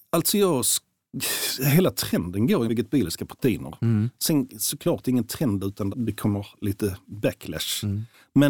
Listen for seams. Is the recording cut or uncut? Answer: cut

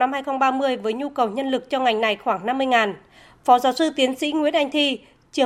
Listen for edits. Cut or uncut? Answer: uncut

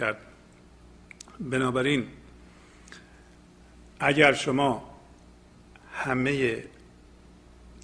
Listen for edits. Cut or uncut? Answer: uncut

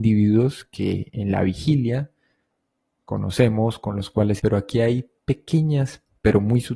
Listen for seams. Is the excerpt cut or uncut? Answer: cut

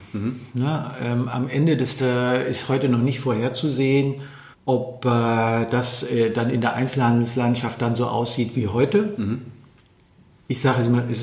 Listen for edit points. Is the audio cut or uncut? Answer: cut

